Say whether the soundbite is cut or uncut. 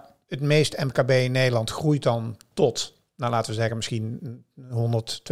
uncut